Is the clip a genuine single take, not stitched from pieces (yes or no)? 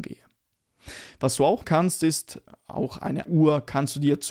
no